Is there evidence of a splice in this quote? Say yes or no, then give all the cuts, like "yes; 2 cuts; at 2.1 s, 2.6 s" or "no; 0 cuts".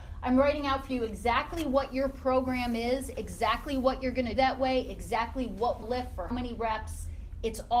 yes; 3 cuts; at 4.4 s, 5.8 s, 6.3 s